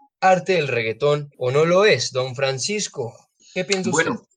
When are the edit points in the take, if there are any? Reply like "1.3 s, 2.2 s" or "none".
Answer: 1.3 s, 3.4 s